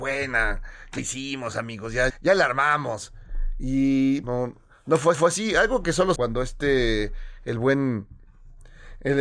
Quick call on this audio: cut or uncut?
cut